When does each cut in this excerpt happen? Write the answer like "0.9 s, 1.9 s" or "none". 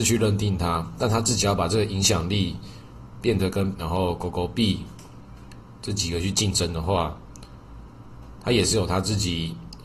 3.7 s